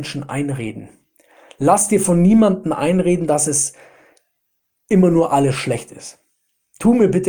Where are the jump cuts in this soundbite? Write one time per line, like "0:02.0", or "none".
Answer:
none

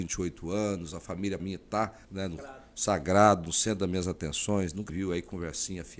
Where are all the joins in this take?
0:01.4
0:02.0
0:02.4
0:04.9

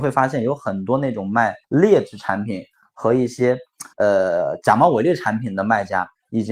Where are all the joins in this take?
0:01.6
0:03.9

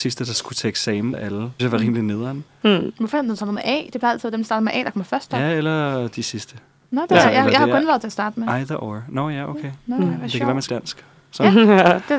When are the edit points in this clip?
0:01.1
0:01.6
0:10.7

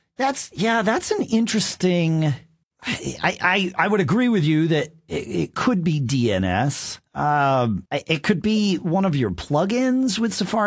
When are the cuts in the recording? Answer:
0:02.6
0:07.1
0:07.9

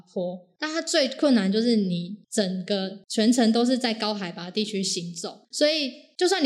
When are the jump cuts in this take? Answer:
0:05.4

